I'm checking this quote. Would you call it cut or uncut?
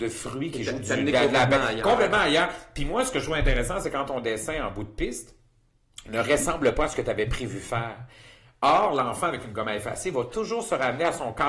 uncut